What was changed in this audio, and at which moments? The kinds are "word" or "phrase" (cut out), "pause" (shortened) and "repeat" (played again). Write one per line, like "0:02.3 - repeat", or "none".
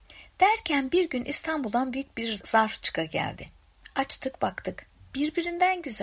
none

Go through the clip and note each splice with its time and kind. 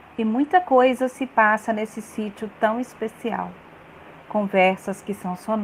none

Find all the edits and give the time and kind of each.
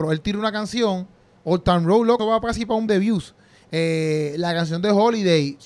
0:02.2 - word
0:02.9 - word

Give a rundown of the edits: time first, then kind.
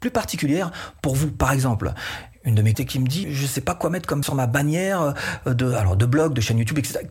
0:02.7 - phrase
0:03.2 - word
0:04.2 - word

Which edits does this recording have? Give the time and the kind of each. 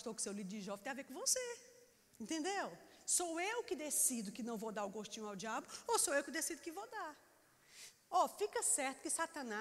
0:01.9 - pause

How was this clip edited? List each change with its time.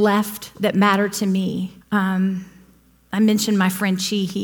0:01.8 - pause

